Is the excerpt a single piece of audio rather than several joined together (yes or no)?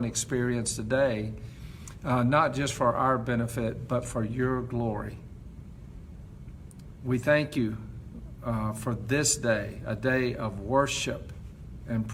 yes